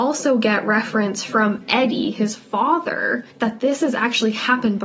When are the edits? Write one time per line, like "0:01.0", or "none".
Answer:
0:03.3